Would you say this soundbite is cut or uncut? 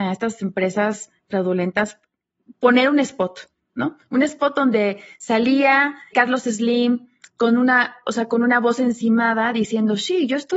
cut